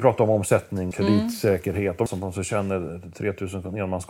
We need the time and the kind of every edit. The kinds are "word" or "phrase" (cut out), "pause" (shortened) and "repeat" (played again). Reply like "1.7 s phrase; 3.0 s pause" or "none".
0.9 s word; 2.1 s phrase